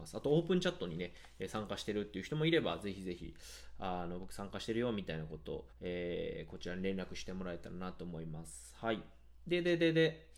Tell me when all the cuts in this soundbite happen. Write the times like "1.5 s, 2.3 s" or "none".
5.7 s